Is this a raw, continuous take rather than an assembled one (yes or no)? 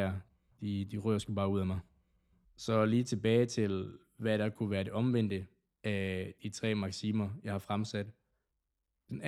yes